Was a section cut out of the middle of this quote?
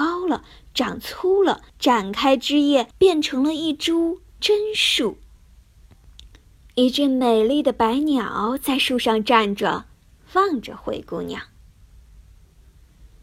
yes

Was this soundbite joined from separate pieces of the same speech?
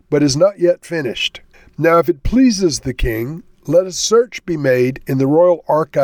yes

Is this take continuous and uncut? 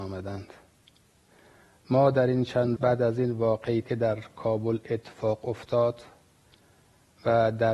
no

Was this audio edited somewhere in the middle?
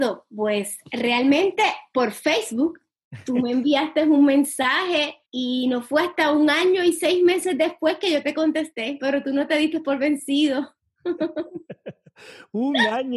yes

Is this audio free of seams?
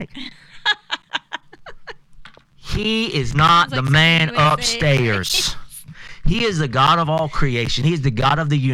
yes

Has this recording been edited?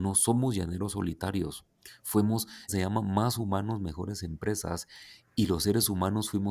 yes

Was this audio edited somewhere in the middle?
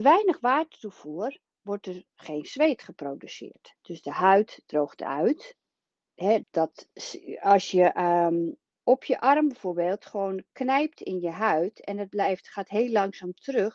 yes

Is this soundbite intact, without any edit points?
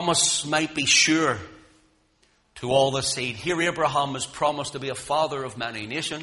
yes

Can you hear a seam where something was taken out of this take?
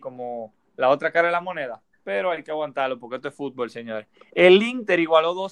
no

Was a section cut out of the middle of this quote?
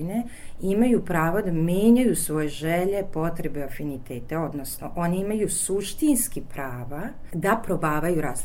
no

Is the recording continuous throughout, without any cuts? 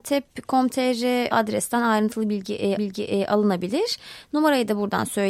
no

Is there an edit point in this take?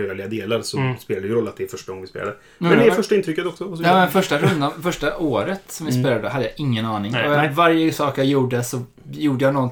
no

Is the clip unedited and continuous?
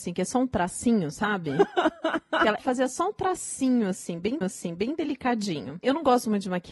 no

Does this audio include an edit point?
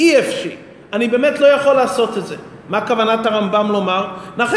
no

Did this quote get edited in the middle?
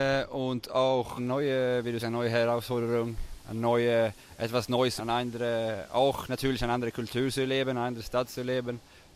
yes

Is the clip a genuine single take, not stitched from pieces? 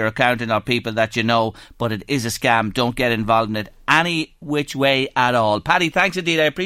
yes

